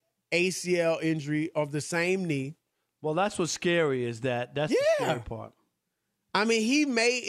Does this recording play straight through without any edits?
yes; 0 cuts

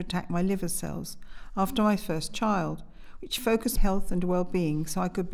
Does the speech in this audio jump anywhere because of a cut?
yes; 1 cut; at 3.8 s

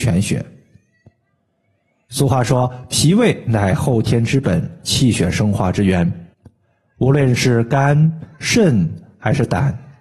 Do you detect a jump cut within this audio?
yes; 1 cut; at 6.3 s

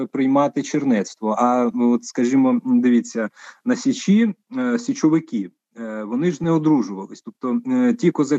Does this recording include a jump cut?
no; 0 cuts

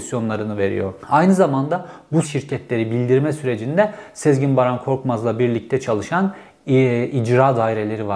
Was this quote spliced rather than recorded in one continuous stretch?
yes; 2 cuts; at 1.0 s, 2.2 s

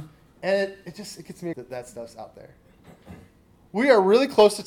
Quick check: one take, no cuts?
no; 1 cut; at 1.5 s

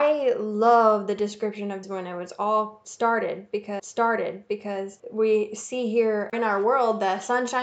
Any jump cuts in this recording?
yes; 3 cuts; at 1.8 s, 3.8 s, 6.3 s

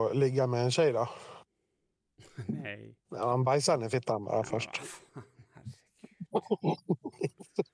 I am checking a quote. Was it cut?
yes; 1 cut; at 3.0 s

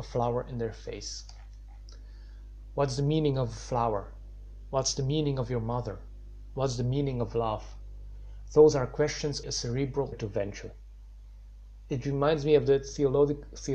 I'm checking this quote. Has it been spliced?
yes; 2 cuts; at 9.4 s, 10.1 s

